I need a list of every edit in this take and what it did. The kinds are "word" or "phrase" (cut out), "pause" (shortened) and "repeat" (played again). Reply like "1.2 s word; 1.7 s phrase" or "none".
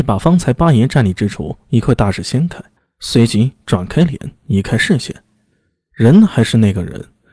2.8 s pause